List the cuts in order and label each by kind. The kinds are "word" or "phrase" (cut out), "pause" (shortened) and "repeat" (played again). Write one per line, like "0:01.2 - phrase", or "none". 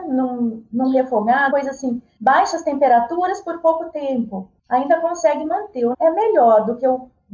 0:01.5 - word
0:05.9 - word